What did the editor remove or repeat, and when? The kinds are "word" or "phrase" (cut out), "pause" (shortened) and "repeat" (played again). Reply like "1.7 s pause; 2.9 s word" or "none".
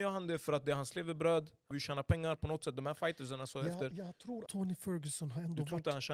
1.7 s word; 4.5 s word